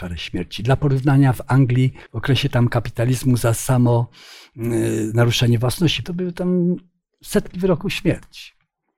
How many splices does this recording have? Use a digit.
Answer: 2